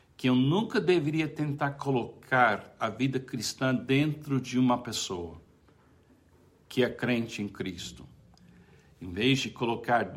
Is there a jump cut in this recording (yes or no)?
no